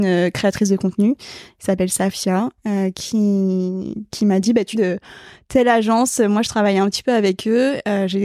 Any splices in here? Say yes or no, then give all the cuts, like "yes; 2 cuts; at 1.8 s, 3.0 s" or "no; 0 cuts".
yes; 1 cut; at 4.7 s